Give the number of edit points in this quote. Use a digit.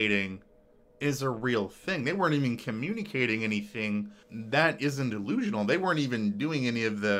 1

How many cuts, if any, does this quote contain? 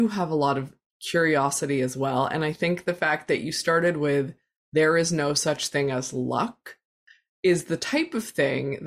0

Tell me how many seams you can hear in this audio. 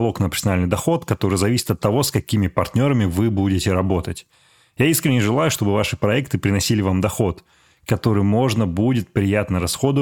0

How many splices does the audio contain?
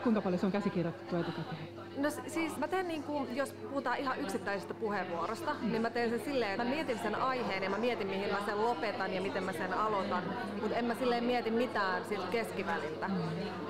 2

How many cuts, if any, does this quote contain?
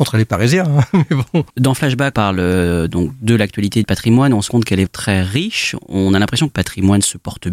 6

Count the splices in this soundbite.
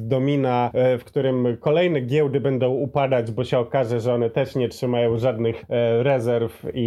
0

